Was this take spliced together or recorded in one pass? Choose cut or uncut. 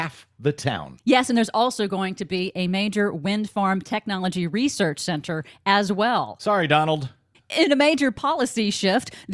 uncut